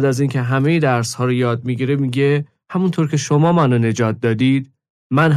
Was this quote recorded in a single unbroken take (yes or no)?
yes